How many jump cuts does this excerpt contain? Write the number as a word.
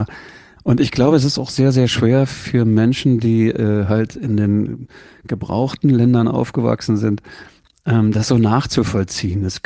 zero